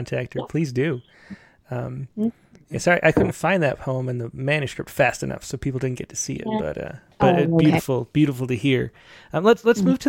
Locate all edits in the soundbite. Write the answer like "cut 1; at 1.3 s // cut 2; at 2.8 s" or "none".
none